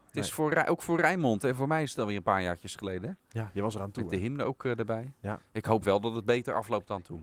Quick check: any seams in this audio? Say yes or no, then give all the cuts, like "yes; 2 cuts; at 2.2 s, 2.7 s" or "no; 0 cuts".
no; 0 cuts